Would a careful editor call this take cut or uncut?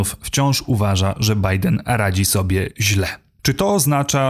uncut